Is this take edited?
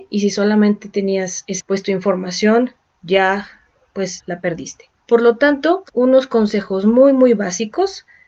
yes; 4 cuts; at 1.6 s, 4.2 s, 5.0 s, 5.9 s

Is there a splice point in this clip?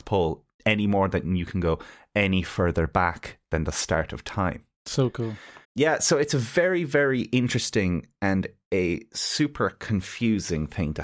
yes; 1 cut; at 5.6 s

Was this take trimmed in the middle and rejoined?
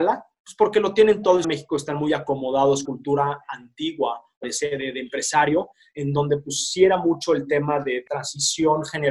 yes; 3 cuts; at 1.4 s, 2.8 s, 4.4 s

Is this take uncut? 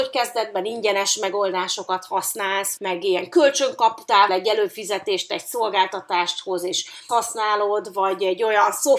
no; 3 cuts; at 2.8 s, 4.3 s, 7.1 s

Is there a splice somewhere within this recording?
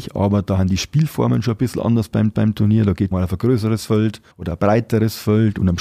yes; 3 cuts; at 2.3 s, 3.1 s, 4.3 s

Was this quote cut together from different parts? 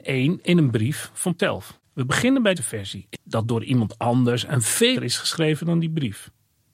yes; 5 cuts; at 1.4 s, 1.8 s, 2.6 s, 3.1 s, 5.0 s

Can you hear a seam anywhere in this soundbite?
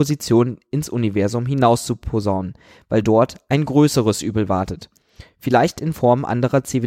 no; 0 cuts

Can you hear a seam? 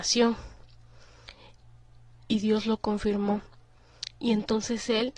no; 0 cuts

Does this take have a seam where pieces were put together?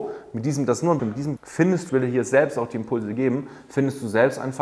yes; 3 cuts; at 1.0 s, 1.4 s, 1.9 s

